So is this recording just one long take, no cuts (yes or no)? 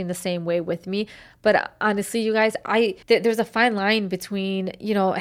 no